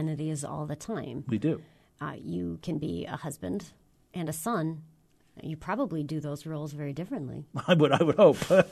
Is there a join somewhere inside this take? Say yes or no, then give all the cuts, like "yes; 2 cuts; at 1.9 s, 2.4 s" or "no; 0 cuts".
no; 0 cuts